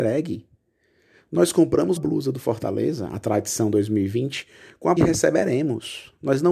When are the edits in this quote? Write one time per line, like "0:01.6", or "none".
0:02.0
0:05.0